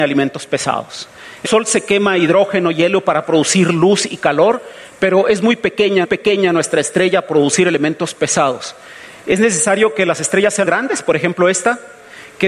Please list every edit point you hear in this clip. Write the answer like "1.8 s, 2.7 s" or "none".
1.4 s, 6.0 s, 7.3 s, 10.6 s